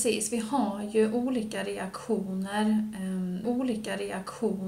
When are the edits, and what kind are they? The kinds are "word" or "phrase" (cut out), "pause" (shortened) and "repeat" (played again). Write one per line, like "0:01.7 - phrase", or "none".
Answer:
0:03.4 - repeat